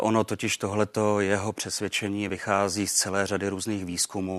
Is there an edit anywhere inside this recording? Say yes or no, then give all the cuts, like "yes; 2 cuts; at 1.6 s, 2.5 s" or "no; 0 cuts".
no; 0 cuts